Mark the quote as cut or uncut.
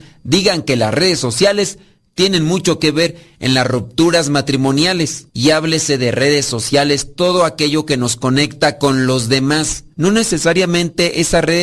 uncut